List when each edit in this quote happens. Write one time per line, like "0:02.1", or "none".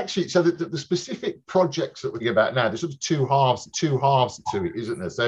0:02.2
0:03.7

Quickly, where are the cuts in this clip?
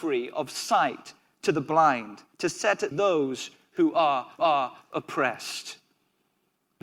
0:02.3
0:02.9
0:04.4

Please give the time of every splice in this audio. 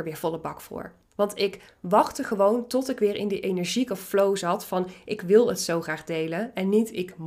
none

